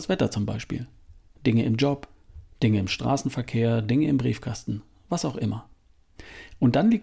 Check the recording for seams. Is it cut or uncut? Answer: uncut